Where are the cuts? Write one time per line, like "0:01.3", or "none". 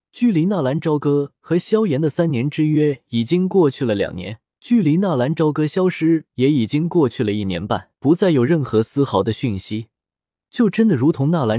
0:04.4
0:07.9